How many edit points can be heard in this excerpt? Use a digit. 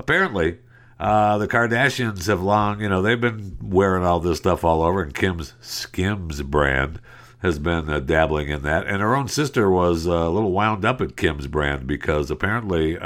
0